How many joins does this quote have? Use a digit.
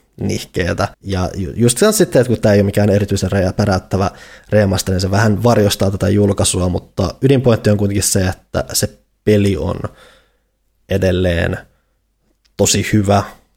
1